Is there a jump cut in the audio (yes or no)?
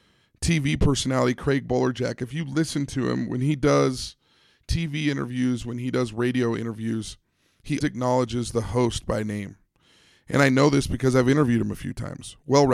yes